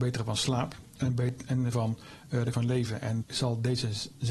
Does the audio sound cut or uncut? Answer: cut